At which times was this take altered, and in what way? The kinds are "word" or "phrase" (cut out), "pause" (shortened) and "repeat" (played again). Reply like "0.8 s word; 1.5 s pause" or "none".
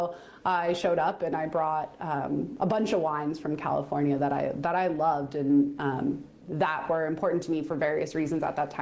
none